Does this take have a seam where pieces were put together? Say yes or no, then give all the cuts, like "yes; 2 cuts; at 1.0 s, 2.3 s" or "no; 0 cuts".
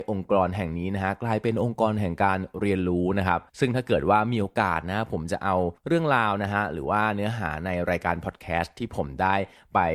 yes; 2 cuts; at 3.5 s, 5.8 s